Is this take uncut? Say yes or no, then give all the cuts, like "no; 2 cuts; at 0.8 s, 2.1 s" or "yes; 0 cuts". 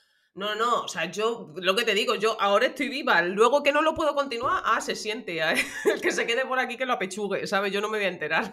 yes; 0 cuts